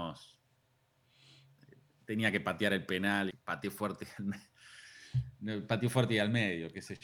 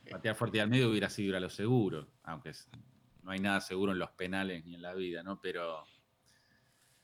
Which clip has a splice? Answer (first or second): first